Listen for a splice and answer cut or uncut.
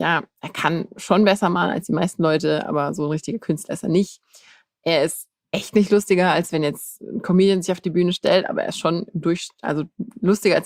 uncut